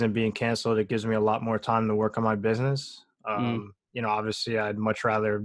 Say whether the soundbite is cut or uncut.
uncut